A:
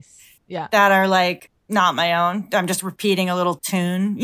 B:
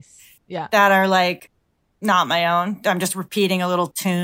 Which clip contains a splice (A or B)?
A